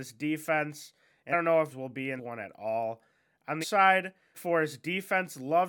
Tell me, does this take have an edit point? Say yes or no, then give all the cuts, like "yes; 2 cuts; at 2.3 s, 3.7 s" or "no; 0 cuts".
yes; 5 cuts; at 1.3 s, 1.7 s, 2.2 s, 3.6 s, 4.3 s